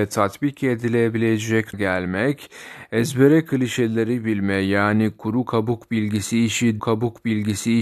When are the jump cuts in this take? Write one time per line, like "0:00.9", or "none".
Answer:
0:01.7
0:06.8